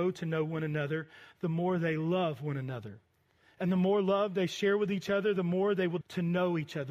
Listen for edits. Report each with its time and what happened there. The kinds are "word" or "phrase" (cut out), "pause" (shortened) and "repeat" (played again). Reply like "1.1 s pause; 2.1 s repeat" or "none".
6.0 s word